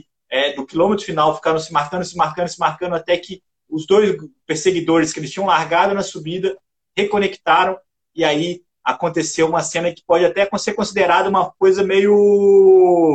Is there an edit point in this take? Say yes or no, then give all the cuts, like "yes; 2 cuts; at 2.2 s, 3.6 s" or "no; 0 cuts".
no; 0 cuts